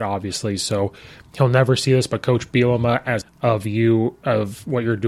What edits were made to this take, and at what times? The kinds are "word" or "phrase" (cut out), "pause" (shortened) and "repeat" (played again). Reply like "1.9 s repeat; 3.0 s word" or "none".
3.2 s phrase